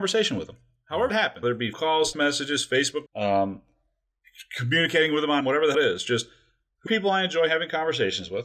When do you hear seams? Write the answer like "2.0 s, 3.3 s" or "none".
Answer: 1.1 s, 1.4 s, 1.7 s, 2.1 s, 3.1 s, 5.4 s, 5.7 s, 6.9 s